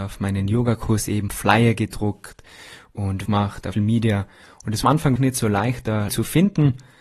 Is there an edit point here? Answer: yes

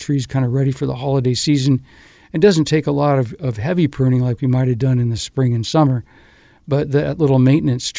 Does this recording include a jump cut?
no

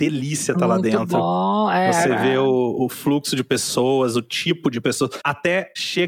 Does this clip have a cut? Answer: no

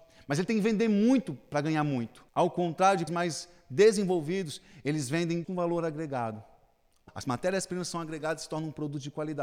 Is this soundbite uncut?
no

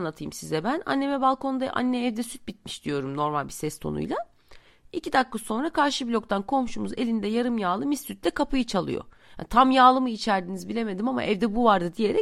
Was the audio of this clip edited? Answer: no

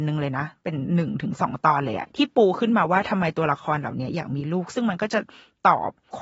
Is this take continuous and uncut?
yes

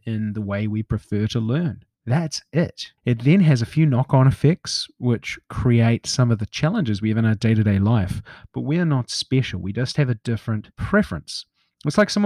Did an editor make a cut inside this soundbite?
yes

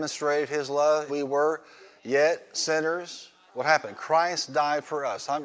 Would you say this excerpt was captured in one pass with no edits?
no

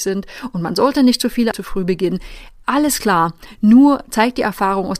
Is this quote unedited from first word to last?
no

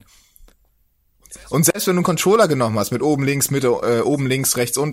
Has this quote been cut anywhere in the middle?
no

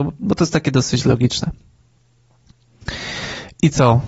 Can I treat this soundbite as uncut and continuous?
yes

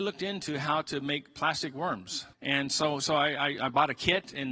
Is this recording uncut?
no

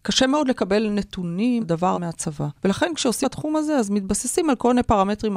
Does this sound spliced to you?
yes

